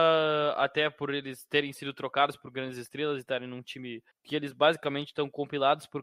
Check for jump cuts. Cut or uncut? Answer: cut